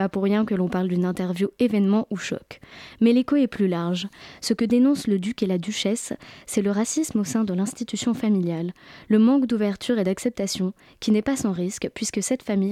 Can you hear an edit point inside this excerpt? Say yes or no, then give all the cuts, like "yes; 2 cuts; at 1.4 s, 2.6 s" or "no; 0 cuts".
no; 0 cuts